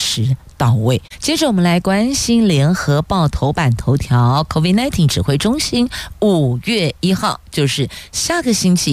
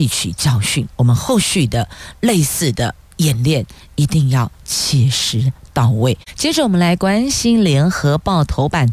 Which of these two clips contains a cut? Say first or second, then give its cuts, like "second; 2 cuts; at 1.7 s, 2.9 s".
second; 1 cut; at 0.9 s